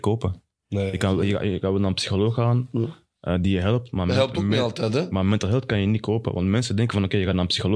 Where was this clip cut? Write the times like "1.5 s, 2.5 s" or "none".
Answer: none